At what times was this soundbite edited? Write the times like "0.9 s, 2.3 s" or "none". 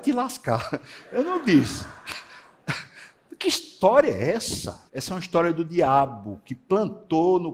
4.9 s